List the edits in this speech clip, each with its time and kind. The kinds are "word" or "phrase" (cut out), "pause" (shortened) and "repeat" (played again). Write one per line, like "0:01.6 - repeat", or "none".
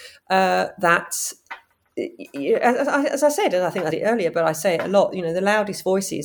0:03.9 - word